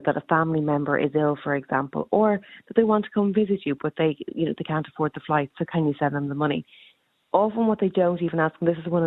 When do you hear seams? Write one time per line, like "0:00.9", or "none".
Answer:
none